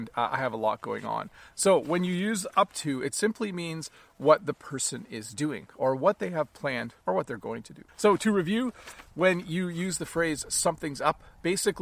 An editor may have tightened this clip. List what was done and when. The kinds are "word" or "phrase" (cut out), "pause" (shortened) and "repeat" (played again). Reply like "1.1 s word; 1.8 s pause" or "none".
7.0 s pause; 7.9 s pause